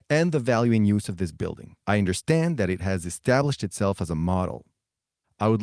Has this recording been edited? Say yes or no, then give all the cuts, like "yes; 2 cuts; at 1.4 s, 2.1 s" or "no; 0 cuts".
yes; 1 cut; at 1.8 s